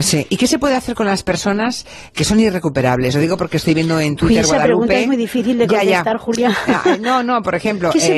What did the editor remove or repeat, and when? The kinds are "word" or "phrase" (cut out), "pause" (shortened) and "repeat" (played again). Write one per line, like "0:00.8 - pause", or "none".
0:02.1 - word